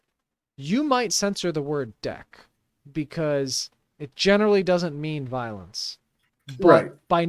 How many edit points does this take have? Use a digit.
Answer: 1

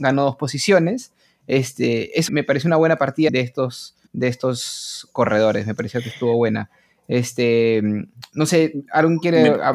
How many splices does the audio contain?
3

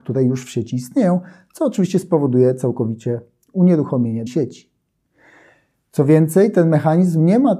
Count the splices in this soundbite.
1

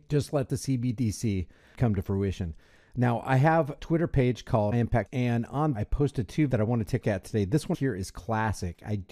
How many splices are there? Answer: 7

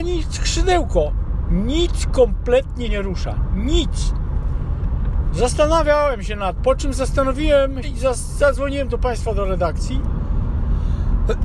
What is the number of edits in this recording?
3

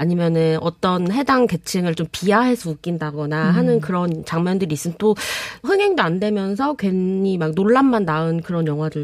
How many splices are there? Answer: 1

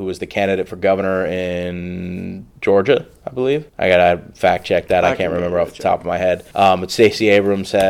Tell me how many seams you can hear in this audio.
3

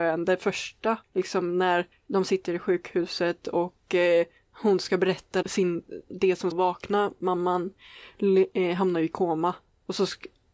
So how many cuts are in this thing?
4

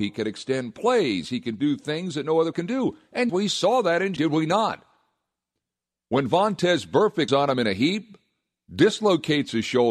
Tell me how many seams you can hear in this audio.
4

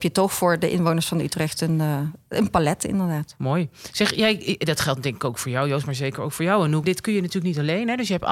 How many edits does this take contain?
1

